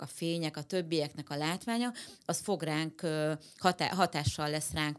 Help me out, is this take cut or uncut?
uncut